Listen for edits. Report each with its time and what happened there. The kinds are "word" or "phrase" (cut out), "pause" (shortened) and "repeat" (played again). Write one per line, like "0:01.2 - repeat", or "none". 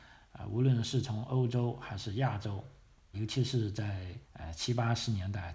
0:03.1 - word
0:04.2 - pause